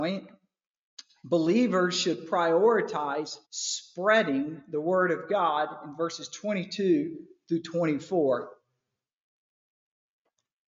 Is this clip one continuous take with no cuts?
no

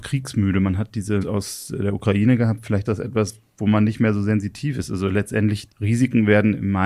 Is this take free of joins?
no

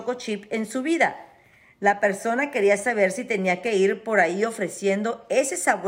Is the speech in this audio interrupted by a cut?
no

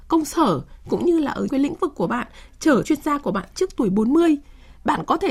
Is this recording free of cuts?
no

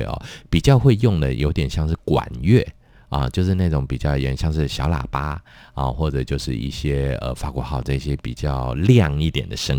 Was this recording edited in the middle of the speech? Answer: no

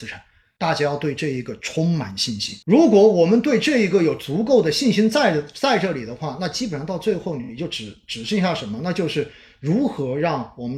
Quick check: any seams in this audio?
yes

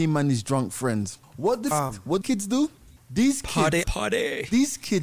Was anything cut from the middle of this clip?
yes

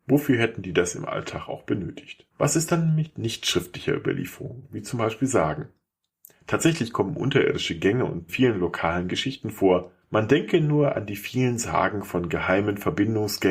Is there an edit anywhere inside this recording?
yes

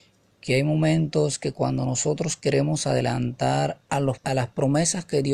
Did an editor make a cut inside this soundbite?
yes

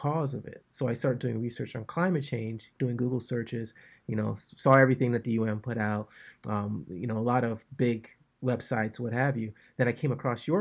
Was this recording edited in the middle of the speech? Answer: no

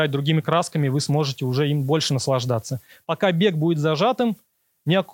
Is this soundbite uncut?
yes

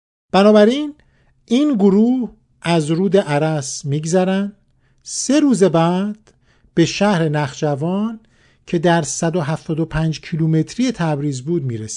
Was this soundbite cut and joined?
no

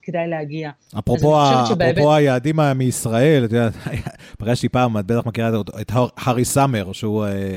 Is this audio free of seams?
yes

